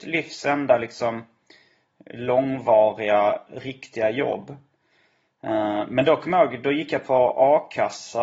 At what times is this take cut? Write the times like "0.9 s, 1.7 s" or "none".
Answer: none